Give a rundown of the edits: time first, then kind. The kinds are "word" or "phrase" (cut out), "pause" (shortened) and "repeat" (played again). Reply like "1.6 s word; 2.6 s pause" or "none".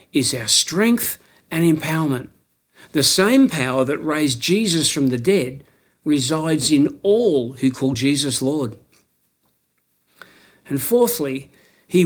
none